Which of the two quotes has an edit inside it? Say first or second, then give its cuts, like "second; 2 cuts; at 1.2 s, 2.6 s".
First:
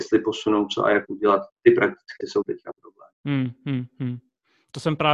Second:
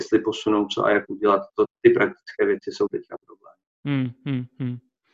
first; 3 cuts; at 1.5 s, 2.2 s, 3.1 s